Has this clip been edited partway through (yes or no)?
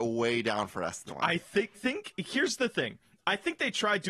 yes